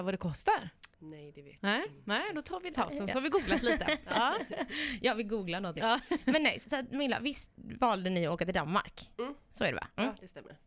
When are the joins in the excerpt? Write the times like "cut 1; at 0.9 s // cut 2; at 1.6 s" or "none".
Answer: cut 1; at 0.9 s // cut 2; at 2.7 s // cut 3; at 6.6 s // cut 4; at 7.5 s